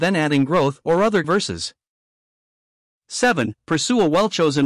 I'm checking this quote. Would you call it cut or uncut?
cut